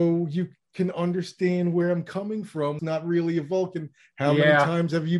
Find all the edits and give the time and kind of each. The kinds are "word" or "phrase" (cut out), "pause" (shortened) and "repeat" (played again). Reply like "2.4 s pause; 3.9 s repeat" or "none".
2.8 s phrase